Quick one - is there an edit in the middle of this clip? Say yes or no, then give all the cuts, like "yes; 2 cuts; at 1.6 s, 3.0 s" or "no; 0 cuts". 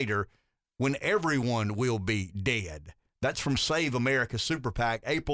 no; 0 cuts